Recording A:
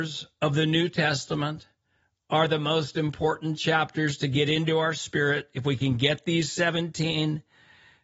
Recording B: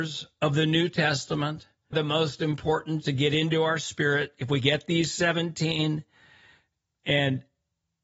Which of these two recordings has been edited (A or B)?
B